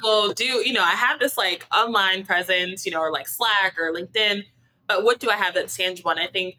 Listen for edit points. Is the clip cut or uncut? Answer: uncut